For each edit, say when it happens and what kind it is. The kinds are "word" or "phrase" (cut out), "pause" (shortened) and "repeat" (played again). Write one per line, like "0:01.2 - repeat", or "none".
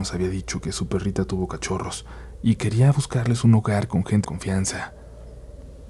0:04.2 - word